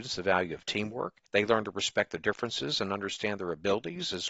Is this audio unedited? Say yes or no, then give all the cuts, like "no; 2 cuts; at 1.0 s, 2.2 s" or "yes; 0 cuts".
no; 1 cut; at 1.3 s